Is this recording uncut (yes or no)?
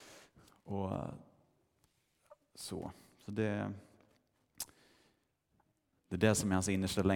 yes